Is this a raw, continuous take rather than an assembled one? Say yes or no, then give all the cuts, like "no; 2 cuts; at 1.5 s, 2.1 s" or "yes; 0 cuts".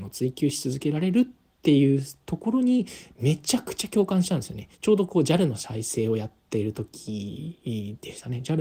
no; 1 cut; at 4.7 s